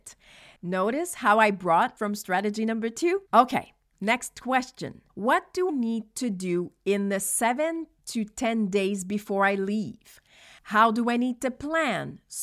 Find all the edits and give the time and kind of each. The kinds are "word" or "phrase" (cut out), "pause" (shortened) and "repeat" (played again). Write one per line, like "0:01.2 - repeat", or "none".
0:02.0 - phrase
0:03.2 - pause
0:05.1 - pause
0:05.7 - word